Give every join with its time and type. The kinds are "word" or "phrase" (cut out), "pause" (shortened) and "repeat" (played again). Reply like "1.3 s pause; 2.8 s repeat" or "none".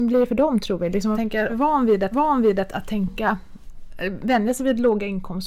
1.1 s word; 1.5 s phrase; 2.1 s repeat